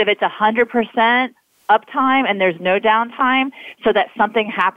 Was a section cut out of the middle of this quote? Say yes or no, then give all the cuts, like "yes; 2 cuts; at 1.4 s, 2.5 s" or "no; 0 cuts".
no; 0 cuts